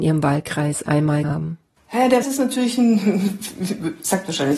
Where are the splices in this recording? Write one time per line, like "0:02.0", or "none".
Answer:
0:01.2
0:02.2